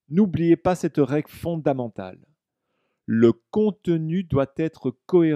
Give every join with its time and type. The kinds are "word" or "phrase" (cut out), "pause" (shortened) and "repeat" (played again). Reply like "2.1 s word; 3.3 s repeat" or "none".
none